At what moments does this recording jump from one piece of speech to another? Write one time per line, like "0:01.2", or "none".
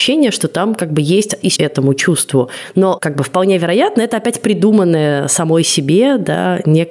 0:01.6